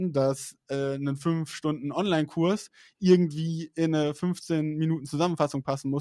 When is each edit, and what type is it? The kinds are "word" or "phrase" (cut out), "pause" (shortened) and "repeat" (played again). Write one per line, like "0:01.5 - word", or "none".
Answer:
none